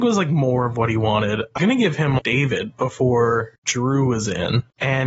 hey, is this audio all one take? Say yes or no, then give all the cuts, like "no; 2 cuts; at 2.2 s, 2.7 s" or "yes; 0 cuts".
no; 2 cuts; at 1.6 s, 2.2 s